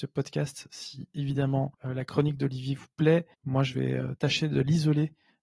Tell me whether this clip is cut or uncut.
cut